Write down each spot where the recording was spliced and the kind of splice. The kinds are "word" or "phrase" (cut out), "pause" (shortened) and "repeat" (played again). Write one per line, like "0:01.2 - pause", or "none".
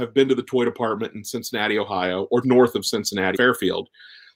0:02.4 - word
0:03.3 - word